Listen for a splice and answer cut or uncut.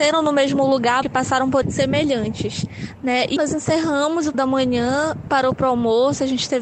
cut